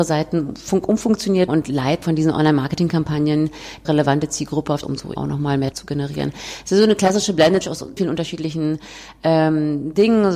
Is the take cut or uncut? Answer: cut